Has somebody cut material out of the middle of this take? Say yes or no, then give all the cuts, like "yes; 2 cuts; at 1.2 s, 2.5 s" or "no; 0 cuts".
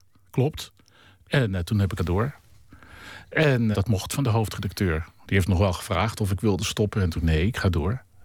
yes; 3 cuts; at 2.0 s, 3.7 s, 7.2 s